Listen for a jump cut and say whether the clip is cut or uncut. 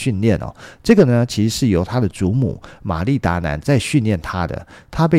uncut